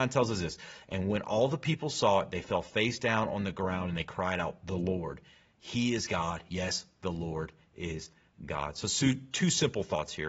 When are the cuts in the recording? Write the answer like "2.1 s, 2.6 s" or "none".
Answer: none